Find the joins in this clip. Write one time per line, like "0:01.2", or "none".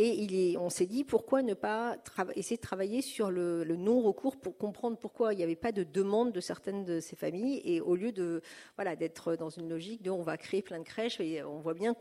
none